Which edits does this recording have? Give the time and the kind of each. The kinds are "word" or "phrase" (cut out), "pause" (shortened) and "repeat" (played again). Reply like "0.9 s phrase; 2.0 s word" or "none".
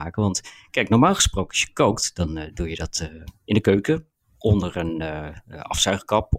none